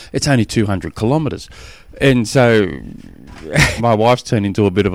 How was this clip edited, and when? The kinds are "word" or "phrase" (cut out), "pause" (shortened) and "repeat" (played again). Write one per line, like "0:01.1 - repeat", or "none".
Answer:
0:03.8 - word